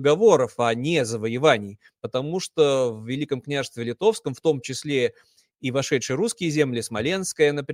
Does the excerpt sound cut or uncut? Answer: uncut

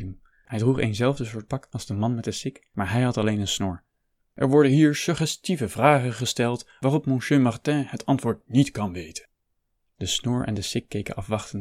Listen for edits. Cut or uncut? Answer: uncut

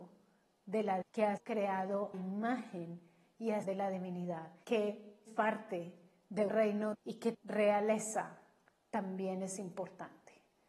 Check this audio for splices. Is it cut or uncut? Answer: cut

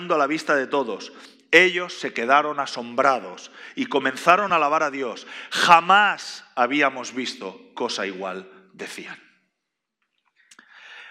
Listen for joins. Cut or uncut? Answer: uncut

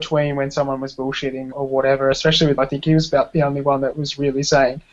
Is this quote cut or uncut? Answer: cut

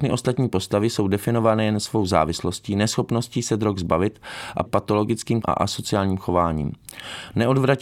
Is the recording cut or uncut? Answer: cut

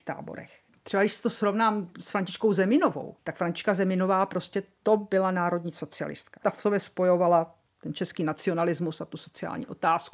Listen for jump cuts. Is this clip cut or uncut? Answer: uncut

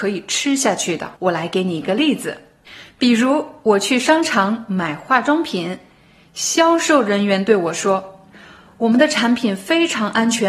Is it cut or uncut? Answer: cut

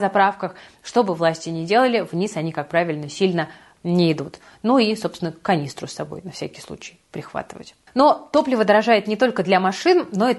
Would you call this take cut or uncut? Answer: uncut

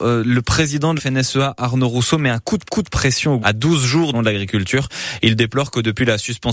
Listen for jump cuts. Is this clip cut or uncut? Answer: cut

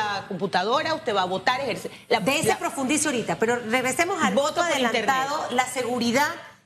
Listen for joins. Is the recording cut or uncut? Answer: uncut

